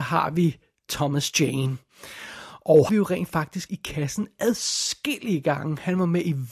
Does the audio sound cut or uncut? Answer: cut